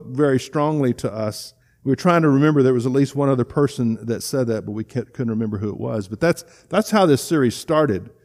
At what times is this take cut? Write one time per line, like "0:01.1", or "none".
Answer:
0:01.6